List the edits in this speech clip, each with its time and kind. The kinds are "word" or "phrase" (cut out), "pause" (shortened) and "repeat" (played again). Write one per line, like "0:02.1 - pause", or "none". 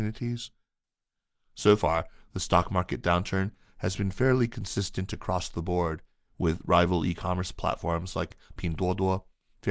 none